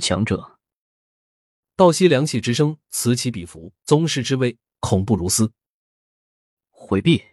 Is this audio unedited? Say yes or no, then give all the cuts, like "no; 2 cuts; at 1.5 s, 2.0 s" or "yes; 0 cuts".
no; 1 cut; at 3.8 s